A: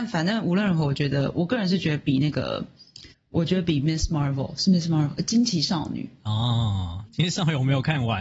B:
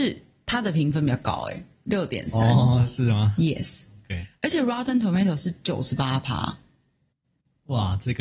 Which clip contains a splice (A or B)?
A